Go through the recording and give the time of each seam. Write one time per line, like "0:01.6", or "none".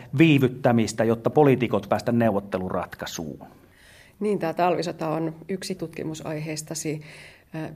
0:01.9
0:05.8